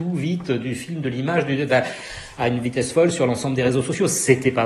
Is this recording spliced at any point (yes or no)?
no